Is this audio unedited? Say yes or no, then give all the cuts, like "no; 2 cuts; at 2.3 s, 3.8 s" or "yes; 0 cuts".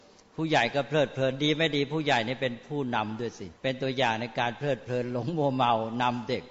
no; 1 cut; at 3.6 s